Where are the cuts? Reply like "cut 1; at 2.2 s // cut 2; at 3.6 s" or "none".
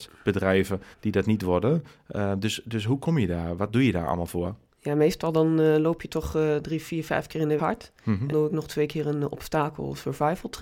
cut 1; at 0.9 s // cut 2; at 7.6 s // cut 3; at 8.3 s